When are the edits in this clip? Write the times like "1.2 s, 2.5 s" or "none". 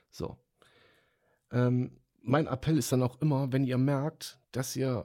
none